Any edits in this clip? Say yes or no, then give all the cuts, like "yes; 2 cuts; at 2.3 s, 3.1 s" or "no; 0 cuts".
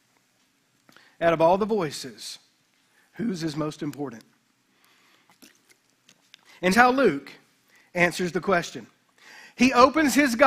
yes; 1 cut; at 6.7 s